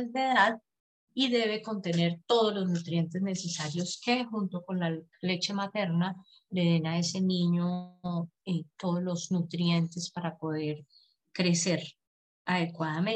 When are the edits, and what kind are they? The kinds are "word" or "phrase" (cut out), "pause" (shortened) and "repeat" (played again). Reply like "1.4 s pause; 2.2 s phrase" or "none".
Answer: none